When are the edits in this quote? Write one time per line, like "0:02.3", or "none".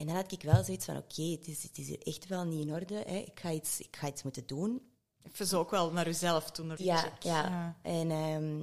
0:06.8